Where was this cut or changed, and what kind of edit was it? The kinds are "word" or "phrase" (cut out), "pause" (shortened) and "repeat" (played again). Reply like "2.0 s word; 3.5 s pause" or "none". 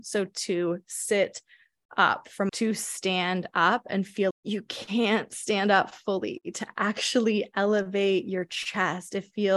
2.5 s phrase; 4.3 s word